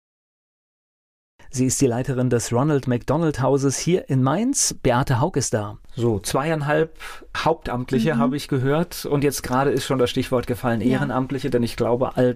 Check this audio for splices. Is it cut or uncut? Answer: uncut